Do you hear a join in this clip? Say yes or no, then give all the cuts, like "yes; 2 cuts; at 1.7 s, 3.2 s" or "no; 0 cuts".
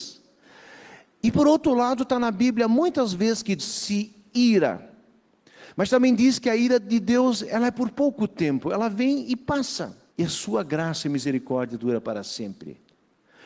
yes; 3 cuts; at 1.1 s, 3.6 s, 10.1 s